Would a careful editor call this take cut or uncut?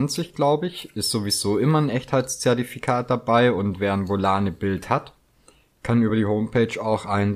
uncut